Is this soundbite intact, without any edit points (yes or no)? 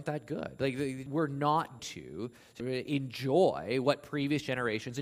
no